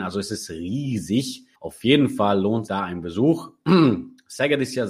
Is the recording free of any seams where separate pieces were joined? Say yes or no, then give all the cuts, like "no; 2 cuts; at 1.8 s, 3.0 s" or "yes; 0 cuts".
no; 2 cuts; at 1.5 s, 2.7 s